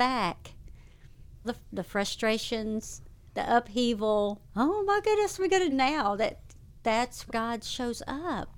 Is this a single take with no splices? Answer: no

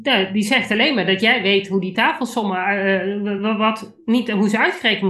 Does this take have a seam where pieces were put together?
no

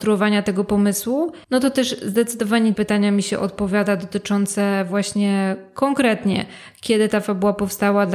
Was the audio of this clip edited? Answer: yes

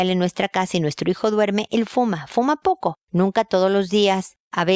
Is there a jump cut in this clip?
no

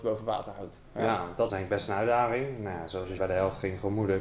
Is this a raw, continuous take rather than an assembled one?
no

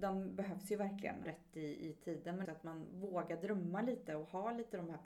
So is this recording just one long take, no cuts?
no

